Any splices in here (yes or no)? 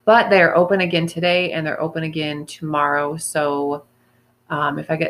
no